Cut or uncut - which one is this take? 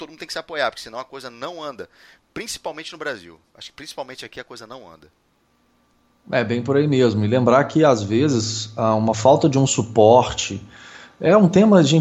uncut